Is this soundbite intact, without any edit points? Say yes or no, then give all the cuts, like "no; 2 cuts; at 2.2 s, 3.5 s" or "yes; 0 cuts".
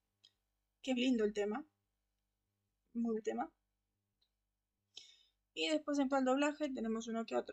no; 3 cuts; at 1.0 s, 3.2 s, 6.1 s